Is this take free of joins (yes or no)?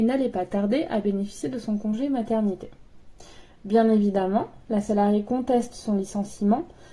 yes